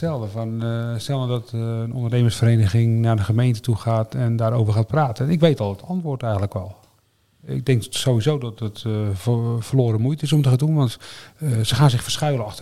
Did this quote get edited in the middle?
no; 0 cuts

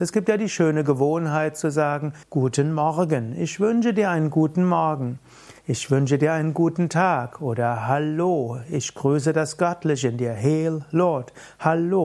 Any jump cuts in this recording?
yes; 2 cuts; at 2.2 s, 5.6 s

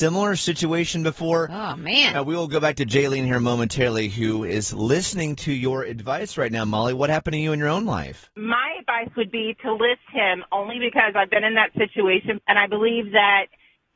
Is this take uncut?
no; 1 cut; at 12.4 s

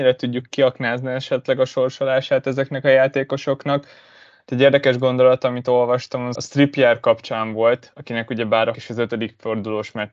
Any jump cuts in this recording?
yes; 2 cuts; at 6.4 s, 8.7 s

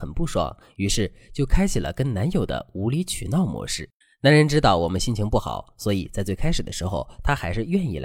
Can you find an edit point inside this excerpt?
yes; 1 cut; at 4.0 s

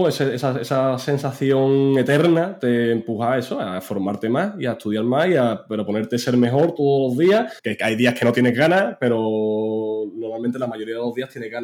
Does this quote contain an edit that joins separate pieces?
yes; 1 cut; at 7.6 s

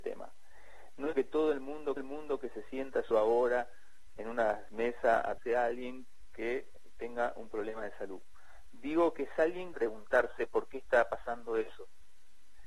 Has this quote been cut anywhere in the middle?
yes; 6 cuts; at 1.1 s, 2.0 s, 3.1 s, 4.2 s, 5.4 s, 9.7 s

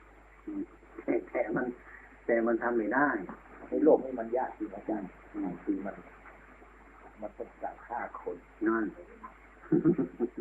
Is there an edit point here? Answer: no; 0 cuts

